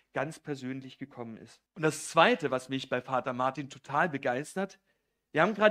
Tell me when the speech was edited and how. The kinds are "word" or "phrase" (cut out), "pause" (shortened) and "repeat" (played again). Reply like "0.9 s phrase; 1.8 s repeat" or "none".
1.7 s pause